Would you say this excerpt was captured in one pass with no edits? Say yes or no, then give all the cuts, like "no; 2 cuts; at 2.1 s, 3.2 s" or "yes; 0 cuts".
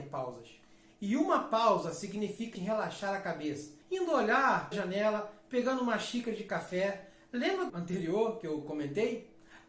no; 4 cuts; at 2.5 s, 3.8 s, 4.7 s, 7.7 s